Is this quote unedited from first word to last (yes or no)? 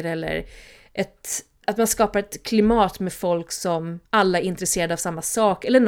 no